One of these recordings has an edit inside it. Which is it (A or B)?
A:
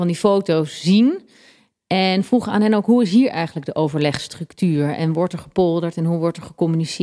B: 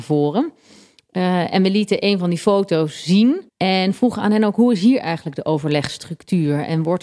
B